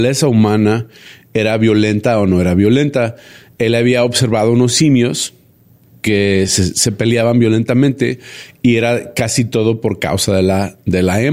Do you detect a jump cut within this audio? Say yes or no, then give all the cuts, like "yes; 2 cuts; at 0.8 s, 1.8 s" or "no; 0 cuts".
no; 0 cuts